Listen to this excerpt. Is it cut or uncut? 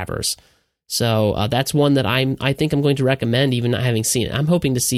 uncut